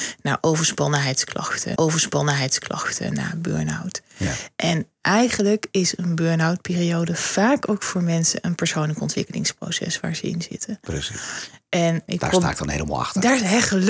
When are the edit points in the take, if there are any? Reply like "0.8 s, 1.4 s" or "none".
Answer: 1.8 s, 12.1 s